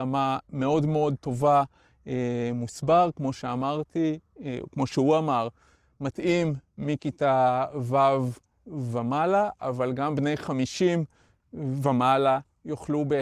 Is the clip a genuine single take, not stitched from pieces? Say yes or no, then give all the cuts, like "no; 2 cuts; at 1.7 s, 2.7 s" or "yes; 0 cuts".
yes; 0 cuts